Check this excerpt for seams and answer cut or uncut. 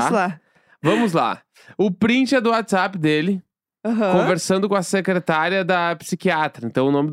uncut